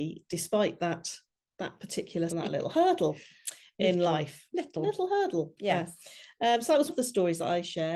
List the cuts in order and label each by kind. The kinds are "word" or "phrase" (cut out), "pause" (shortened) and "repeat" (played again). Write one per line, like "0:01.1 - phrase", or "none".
0:02.3 - word
0:06.9 - word